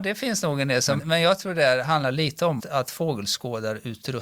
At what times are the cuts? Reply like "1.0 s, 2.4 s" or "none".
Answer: 1.0 s, 2.6 s